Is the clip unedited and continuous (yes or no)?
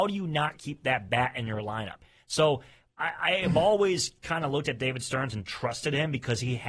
yes